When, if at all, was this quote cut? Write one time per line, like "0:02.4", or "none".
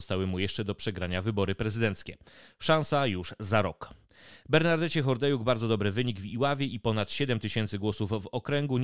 none